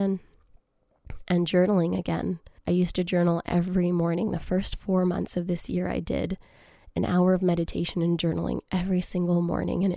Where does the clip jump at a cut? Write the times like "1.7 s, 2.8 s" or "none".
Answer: 2.6 s

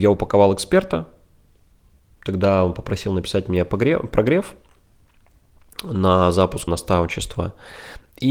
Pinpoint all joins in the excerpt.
6.7 s

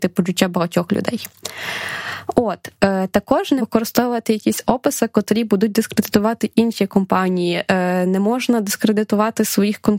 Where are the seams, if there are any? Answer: 3.6 s

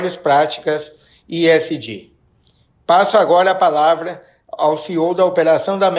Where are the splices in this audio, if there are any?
none

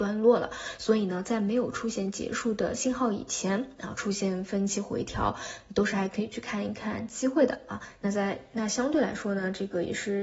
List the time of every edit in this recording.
none

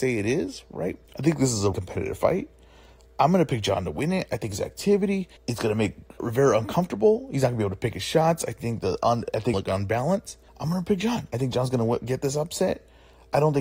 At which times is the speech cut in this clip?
1.1 s, 1.7 s, 5.4 s, 6.2 s, 9.5 s, 10.5 s

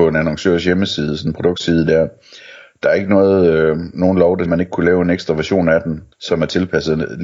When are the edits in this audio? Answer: 4.5 s, 6.1 s

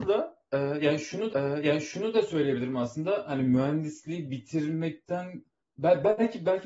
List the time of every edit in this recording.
1.3 s, 5.6 s

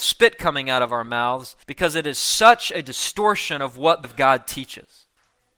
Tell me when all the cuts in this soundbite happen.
1.6 s, 4.0 s

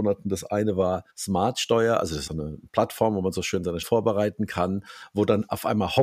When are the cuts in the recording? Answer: 1.1 s, 2.3 s, 3.8 s

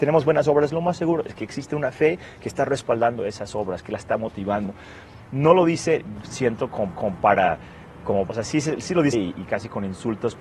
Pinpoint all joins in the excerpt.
6.2 s, 6.9 s, 8.3 s, 9.1 s, 9.5 s

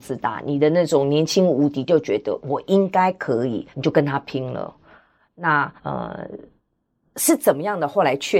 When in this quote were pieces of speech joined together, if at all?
3.7 s, 5.8 s

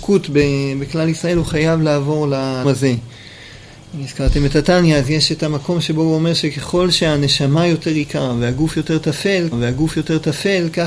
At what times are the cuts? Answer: 2.6 s, 9.5 s

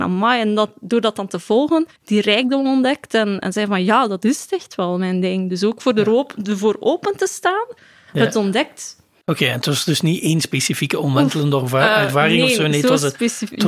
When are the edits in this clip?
2.0 s

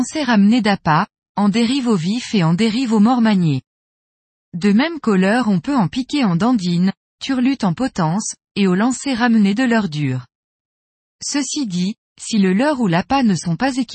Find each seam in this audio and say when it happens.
none

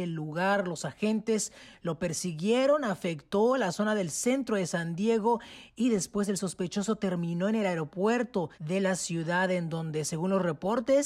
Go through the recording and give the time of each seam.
8.5 s

